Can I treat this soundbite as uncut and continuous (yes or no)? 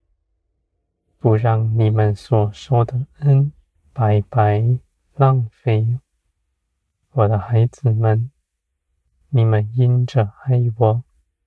no